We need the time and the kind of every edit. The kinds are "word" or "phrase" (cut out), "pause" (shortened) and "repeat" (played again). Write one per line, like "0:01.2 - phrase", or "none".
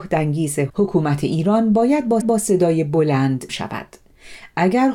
0:02.2 - repeat
0:03.5 - word